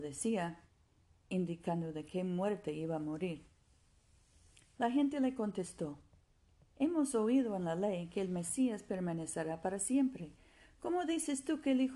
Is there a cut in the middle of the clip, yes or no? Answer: no